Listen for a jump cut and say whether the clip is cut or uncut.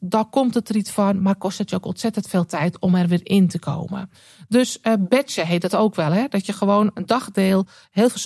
uncut